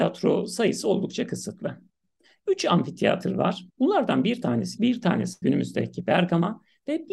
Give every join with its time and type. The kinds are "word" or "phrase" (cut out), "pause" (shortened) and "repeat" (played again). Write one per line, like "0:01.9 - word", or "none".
0:03.7 - pause
0:04.8 - word
0:05.4 - word